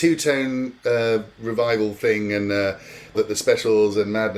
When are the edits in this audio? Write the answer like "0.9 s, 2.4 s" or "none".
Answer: 3.1 s